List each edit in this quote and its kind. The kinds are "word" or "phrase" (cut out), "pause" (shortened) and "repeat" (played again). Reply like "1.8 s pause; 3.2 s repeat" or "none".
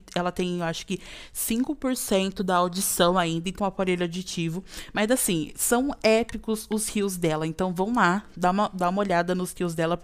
3.6 s phrase